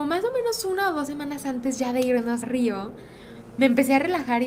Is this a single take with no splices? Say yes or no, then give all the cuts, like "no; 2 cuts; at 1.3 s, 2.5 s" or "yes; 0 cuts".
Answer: no; 1 cut; at 2.4 s